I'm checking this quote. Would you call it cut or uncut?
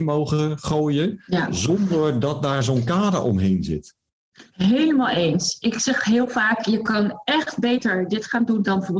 cut